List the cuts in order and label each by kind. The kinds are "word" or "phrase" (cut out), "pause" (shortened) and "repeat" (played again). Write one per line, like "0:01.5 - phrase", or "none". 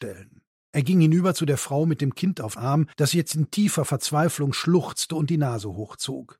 0:02.6 - word
0:02.9 - pause